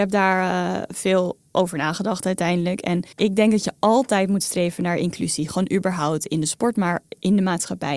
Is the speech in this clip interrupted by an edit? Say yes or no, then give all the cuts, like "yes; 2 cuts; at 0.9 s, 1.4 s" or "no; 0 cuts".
yes; 1 cut; at 3.1 s